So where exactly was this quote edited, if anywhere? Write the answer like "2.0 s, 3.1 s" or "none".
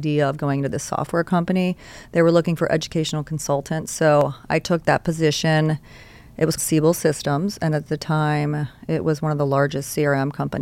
6.6 s